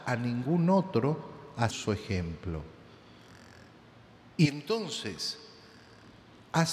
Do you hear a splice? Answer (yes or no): yes